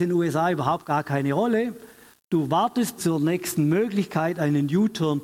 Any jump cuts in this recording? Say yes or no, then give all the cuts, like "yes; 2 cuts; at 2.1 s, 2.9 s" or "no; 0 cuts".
yes; 1 cut; at 3.0 s